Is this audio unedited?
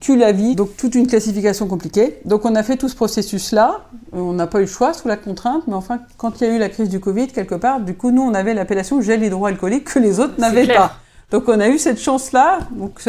yes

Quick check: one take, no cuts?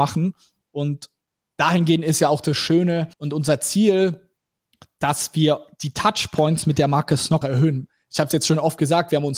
no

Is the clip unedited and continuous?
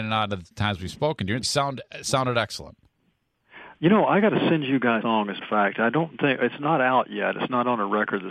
no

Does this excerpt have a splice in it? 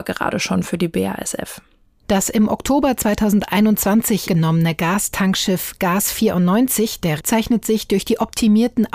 yes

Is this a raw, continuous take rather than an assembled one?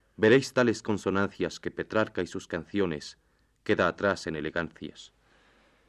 yes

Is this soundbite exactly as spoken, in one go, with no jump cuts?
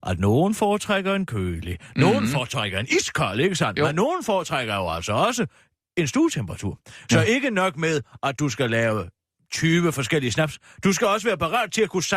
yes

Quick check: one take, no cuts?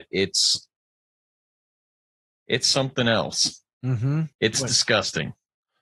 no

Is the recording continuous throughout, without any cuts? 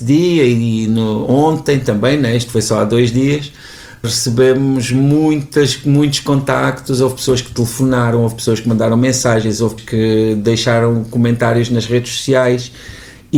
no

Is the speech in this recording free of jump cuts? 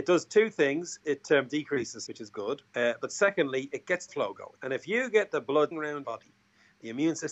no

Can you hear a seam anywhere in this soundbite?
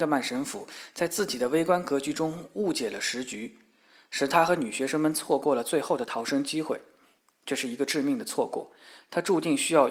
no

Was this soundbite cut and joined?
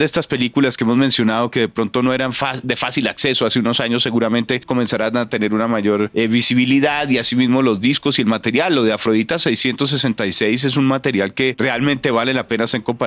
no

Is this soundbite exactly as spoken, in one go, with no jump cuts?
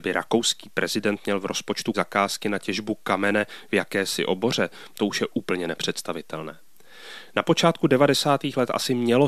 no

